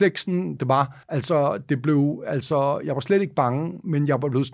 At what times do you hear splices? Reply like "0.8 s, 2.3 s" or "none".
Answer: 1.0 s